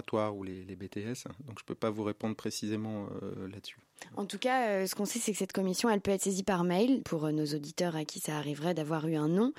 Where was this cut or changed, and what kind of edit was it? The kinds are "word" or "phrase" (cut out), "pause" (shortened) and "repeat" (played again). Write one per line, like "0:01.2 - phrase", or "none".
0:07.0 - word